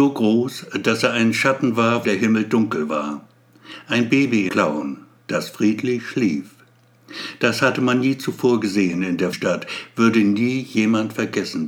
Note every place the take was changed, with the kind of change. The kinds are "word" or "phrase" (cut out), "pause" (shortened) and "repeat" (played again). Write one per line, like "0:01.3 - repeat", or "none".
0:02.0 - word
0:04.5 - word
0:09.3 - word

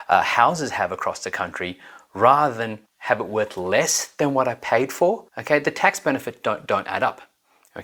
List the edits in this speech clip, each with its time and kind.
0:02.9 - pause
0:05.3 - pause

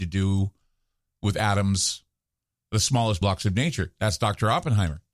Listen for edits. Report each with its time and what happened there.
0:03.2 - word

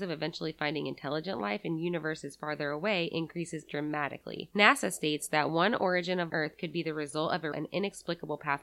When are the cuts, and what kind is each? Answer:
0:06.3 - phrase
0:07.5 - word

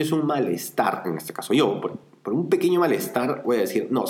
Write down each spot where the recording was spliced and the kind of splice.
none

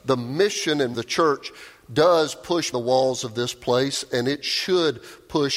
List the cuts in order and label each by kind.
0:00.9 - word
0:02.7 - word

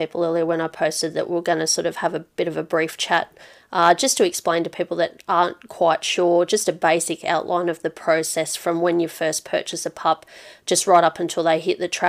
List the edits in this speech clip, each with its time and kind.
none

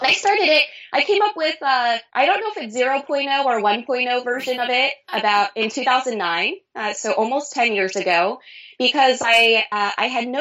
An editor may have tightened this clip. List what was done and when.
0:02.1 - pause

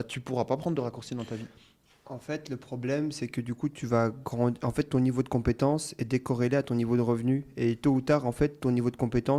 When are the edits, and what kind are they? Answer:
none

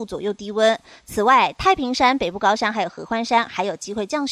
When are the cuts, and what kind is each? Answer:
none

